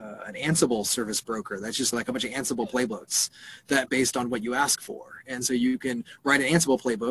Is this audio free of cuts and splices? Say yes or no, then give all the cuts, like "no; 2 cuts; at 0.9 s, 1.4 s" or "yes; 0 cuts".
no; 2 cuts; at 1.9 s, 3.9 s